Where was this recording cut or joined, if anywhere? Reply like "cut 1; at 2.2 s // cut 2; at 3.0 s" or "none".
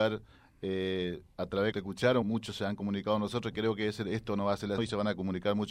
cut 1; at 1.7 s // cut 2; at 2.2 s // cut 3; at 4.8 s